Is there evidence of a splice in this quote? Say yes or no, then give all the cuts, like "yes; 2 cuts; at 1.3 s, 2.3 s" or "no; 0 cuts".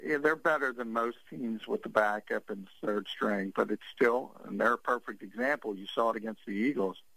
no; 0 cuts